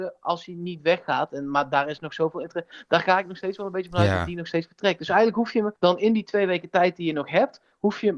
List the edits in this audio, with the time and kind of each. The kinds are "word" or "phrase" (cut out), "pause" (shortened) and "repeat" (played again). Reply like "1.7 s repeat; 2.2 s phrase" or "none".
5.8 s pause